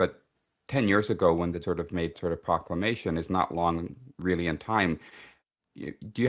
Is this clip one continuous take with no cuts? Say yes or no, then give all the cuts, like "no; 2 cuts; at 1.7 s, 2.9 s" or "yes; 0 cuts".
no; 3 cuts; at 1.6 s, 2.1 s, 4.1 s